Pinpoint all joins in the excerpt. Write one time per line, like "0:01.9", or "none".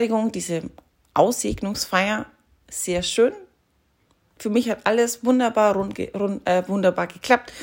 none